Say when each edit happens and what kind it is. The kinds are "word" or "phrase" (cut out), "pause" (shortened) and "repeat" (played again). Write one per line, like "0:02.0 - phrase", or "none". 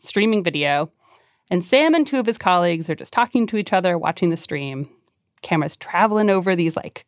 none